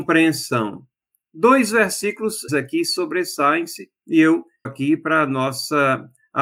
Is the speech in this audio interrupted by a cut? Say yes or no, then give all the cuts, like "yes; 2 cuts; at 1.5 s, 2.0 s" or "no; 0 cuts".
yes; 2 cuts; at 2.5 s, 4.6 s